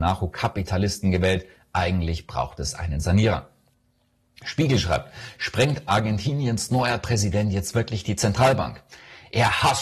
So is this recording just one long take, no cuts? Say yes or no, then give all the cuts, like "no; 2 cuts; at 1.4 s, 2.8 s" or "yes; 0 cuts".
yes; 0 cuts